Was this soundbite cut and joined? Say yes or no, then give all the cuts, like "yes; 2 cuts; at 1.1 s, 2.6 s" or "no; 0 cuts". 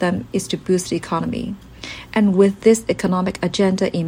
no; 0 cuts